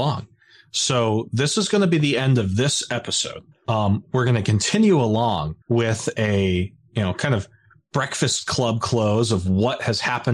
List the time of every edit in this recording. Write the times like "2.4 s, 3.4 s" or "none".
3.5 s, 5.6 s